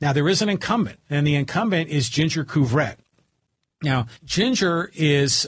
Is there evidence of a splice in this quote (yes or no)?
yes